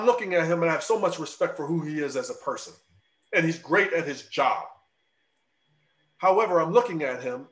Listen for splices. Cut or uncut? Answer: uncut